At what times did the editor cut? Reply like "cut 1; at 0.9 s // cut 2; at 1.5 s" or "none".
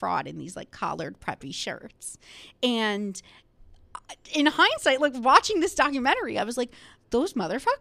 none